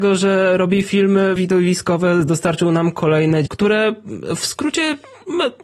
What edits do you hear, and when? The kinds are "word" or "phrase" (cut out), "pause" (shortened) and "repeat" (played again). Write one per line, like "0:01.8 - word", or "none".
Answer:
0:01.4 - word
0:03.5 - word